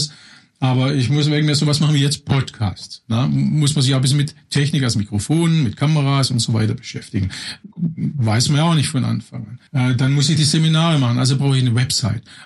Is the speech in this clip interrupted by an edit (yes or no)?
yes